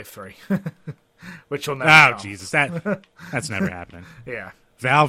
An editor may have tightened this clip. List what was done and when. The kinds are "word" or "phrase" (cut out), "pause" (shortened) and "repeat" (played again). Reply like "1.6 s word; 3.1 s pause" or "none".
none